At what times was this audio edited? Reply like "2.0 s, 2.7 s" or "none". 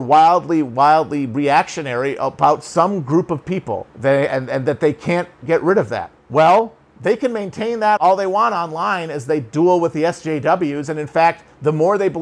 3.9 s, 6.2 s, 8.0 s